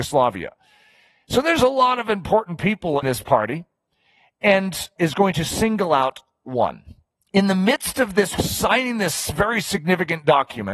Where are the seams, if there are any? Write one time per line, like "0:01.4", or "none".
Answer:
0:03.0
0:05.0
0:07.2
0:08.4